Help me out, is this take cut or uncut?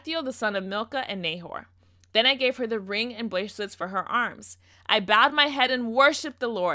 uncut